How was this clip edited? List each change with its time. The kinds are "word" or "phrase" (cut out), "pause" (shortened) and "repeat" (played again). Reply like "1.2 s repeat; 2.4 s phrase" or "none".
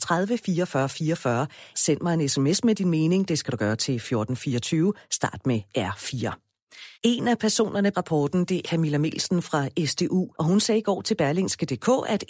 1.7 s word; 6.9 s pause; 7.9 s word; 8.6 s word; 10.3 s pause